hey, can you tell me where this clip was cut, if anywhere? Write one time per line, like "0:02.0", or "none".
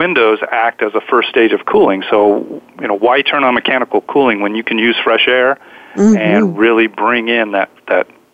none